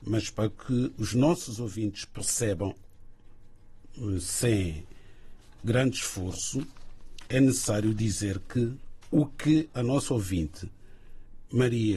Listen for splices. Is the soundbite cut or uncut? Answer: uncut